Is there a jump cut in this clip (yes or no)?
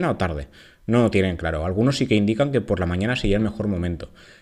no